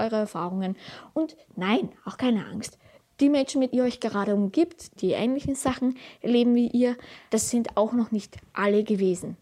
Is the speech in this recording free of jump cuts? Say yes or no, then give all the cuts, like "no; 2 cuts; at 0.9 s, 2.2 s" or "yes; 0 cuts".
no; 2 cuts; at 3.7 s, 5.0 s